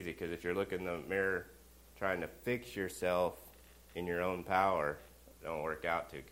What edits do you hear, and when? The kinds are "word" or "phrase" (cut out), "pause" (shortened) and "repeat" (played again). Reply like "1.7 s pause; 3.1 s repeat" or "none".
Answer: none